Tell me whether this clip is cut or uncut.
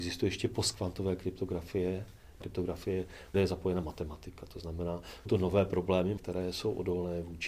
cut